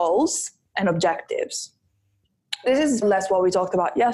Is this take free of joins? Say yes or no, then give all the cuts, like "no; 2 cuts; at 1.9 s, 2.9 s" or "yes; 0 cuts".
no; 1 cut; at 3.0 s